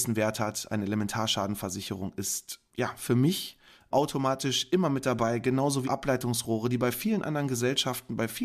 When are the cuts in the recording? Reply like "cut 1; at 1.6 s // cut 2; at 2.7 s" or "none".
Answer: cut 1; at 5.8 s

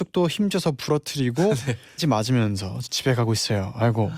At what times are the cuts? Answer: cut 1; at 2.0 s // cut 2; at 2.8 s

